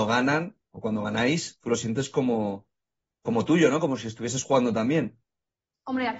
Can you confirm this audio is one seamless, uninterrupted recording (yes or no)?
yes